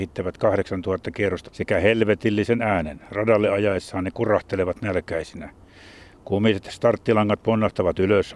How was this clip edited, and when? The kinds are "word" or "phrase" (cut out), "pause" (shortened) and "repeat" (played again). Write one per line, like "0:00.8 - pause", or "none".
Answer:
0:01.4 - word